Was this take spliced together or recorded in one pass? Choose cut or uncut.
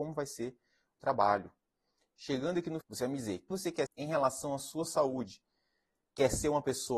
cut